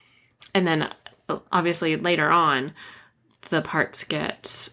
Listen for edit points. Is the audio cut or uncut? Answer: uncut